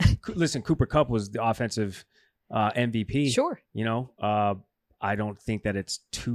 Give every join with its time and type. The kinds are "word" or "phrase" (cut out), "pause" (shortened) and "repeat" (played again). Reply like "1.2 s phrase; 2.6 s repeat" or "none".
3.7 s pause